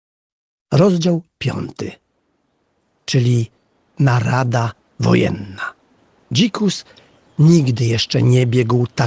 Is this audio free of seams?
no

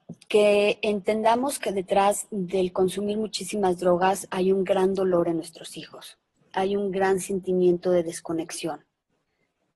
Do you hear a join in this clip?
no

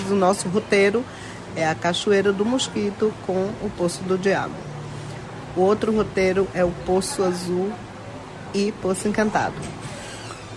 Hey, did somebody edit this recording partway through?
no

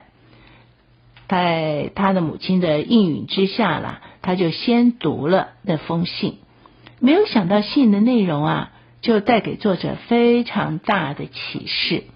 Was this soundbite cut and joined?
no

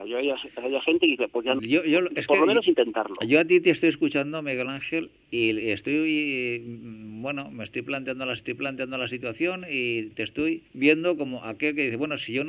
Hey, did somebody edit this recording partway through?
yes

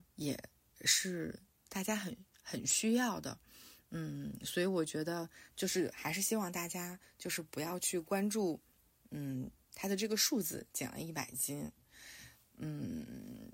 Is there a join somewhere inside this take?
yes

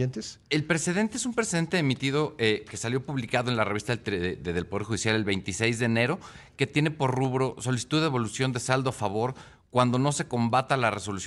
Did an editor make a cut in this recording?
no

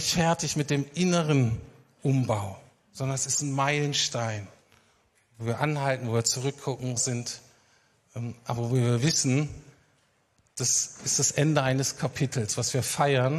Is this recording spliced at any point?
yes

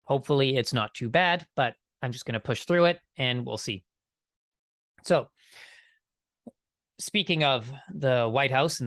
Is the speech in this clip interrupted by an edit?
no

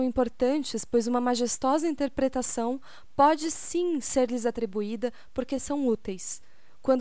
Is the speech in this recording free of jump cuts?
yes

